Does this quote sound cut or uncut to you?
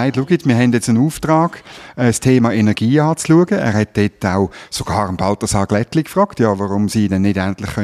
uncut